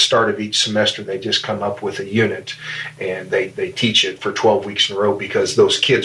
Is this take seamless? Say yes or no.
yes